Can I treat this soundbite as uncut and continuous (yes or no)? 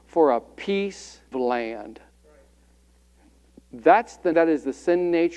no